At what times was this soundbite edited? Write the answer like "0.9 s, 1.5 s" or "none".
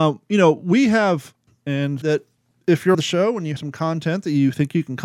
1.5 s, 2.0 s, 2.9 s, 3.6 s